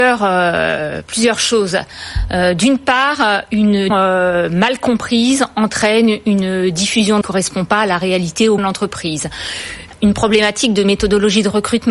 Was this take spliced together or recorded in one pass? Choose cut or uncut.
cut